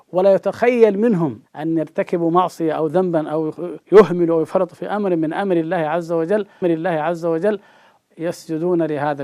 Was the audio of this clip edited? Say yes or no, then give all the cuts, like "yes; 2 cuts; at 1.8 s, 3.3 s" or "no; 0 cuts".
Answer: yes; 3 cuts; at 1.4 s, 3.8 s, 6.6 s